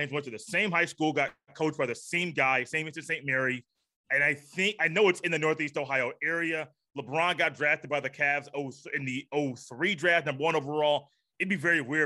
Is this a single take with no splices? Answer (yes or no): yes